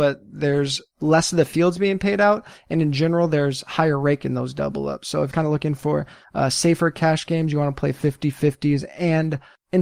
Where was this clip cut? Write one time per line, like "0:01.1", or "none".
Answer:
0:05.3